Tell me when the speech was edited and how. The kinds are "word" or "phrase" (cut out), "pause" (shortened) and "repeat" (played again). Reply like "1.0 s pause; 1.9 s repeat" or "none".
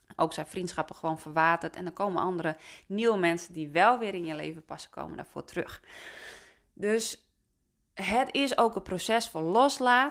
none